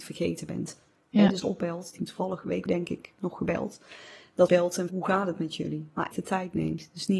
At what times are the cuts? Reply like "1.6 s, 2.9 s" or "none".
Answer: 1.4 s, 2.0 s, 2.7 s, 4.5 s, 4.9 s, 6.1 s